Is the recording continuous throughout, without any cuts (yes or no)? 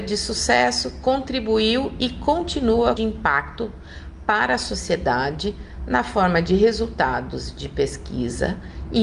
no